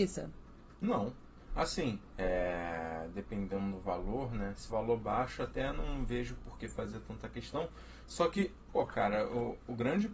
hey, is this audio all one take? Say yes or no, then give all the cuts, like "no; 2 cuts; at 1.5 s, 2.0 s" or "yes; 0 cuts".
no; 1 cut; at 4.7 s